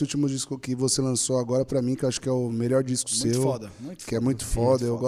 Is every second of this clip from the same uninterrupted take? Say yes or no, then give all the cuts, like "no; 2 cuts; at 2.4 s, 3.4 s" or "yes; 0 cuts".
yes; 0 cuts